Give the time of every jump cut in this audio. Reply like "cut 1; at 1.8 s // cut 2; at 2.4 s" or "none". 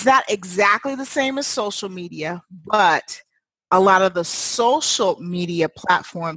none